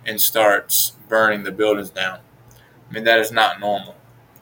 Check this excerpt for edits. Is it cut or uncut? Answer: uncut